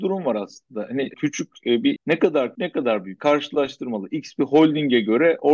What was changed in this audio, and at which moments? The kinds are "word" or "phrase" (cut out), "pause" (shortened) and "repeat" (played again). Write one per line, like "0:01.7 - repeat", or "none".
0:01.1 - word
0:02.0 - word
0:02.5 - word
0:03.2 - word